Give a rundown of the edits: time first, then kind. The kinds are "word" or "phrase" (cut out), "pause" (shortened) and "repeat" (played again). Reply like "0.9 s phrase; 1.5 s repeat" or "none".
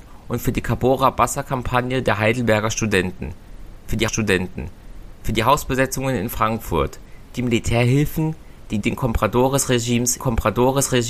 4.1 s repeat; 7.3 s phrase; 8.8 s phrase; 10.2 s repeat